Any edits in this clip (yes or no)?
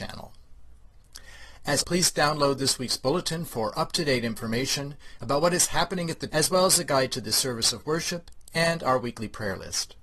yes